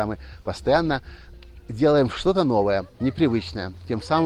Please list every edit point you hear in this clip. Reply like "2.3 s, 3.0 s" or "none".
none